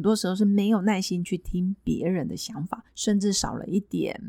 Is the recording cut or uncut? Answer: cut